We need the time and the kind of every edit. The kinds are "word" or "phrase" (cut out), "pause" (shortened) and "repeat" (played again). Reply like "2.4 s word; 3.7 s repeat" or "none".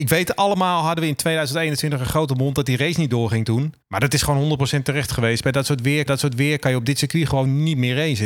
3.8 s pause; 6.1 s repeat